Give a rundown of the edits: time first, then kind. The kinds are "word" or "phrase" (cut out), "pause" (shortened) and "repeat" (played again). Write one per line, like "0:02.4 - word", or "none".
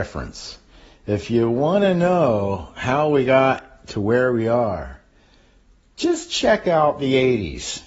none

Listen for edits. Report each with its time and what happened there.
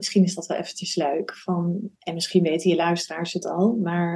0:02.0 - pause

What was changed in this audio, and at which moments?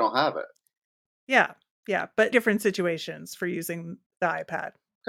0:02.3 - word
0:04.1 - word

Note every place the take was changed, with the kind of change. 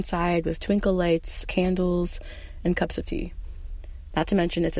0:01.4 - word

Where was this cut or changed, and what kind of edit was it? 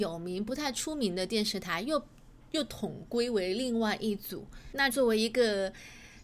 0:04.9 - word

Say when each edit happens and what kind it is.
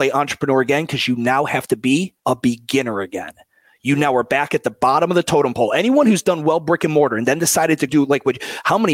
0:02.2 - pause
0:07.9 - word

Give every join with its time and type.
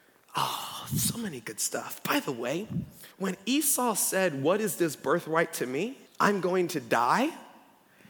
0:03.1 - pause
0:06.1 - pause

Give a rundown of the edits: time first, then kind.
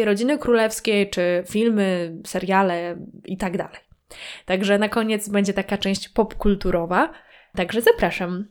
none

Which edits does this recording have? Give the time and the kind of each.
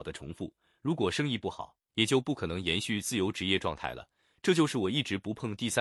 none

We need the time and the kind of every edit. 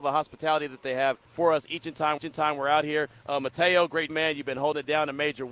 0:01.2 - pause
0:02.2 - repeat
0:04.1 - word

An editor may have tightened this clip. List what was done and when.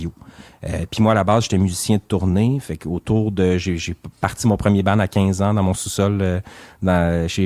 none

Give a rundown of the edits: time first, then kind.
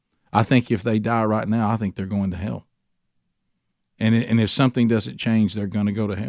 none

